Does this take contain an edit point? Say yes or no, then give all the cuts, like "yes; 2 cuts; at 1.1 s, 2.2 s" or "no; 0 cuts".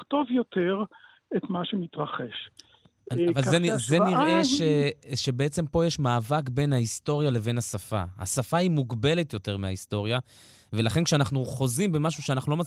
no; 0 cuts